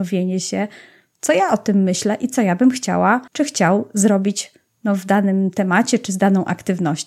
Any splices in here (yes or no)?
yes